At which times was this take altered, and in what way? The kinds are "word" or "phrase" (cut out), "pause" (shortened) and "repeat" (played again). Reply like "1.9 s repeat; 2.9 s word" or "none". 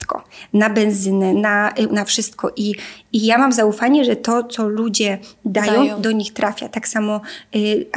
1.9 s word